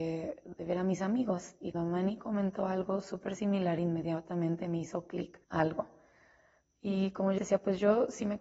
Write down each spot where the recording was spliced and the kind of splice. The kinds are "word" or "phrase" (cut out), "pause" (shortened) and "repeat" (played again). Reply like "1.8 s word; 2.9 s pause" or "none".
1.7 s word; 5.4 s pause; 7.4 s word